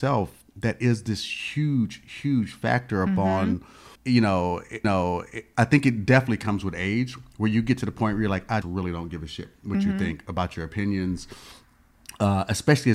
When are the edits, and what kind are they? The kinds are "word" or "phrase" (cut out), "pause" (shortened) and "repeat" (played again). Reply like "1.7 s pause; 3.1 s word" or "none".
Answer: 4.0 s pause; 4.8 s repeat; 8.6 s word